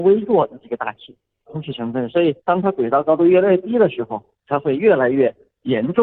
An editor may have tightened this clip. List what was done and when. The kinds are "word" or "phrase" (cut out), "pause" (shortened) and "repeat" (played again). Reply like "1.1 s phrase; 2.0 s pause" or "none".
1.5 s word; 2.4 s pause